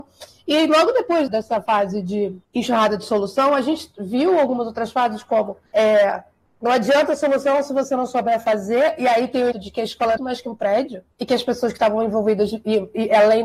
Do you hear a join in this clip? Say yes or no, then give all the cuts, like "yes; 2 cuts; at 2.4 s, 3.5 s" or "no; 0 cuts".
yes; 6 cuts; at 1.3 s, 2.4 s, 5.7 s, 9.5 s, 10.2 s, 11.1 s